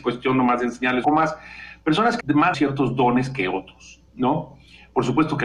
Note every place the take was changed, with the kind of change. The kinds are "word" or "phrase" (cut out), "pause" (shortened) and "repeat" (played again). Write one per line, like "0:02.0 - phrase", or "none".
0:01.0 - phrase
0:02.2 - word
0:02.5 - word
0:04.1 - pause

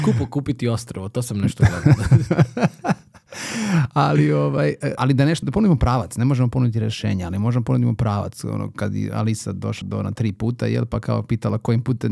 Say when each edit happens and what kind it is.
0:05.0 - word
0:05.4 - word
0:09.8 - word

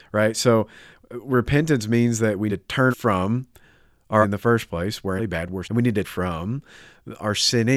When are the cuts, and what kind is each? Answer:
0:02.5 - word
0:02.9 - word
0:04.2 - word
0:05.2 - word
0:05.6 - word
0:06.0 - word

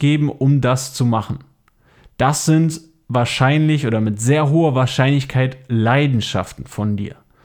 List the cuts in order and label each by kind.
none

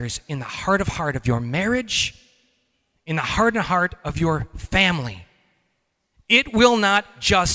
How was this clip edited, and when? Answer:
none

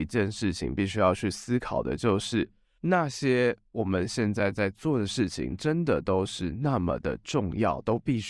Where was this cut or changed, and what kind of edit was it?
none

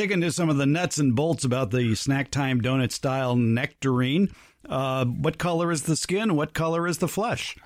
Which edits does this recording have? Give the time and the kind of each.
none

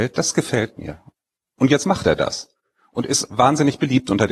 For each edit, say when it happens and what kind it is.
none

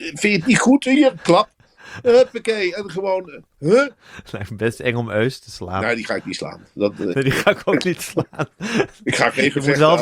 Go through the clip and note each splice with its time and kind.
none

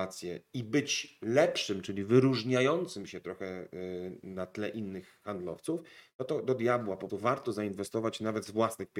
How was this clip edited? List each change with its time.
0:07.1 - word

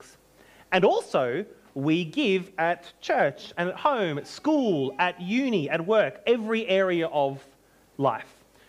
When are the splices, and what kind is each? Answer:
none

